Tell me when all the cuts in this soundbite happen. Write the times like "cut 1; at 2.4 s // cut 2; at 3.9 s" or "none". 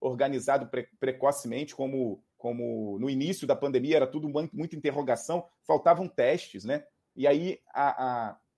cut 1; at 1.0 s // cut 2; at 2.3 s